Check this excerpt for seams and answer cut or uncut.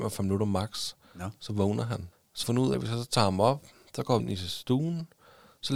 cut